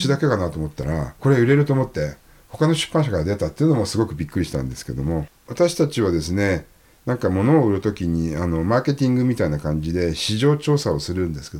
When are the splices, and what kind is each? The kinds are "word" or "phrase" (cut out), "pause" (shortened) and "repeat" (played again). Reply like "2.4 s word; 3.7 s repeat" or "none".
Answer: 1.2 s phrase